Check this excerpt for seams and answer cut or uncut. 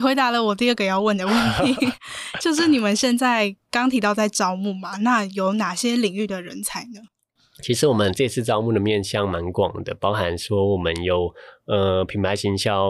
uncut